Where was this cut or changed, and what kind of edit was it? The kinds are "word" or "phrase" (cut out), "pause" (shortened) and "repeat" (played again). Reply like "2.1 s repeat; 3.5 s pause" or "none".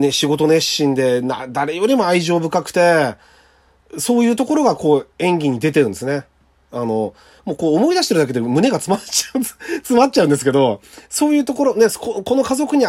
11.0 s pause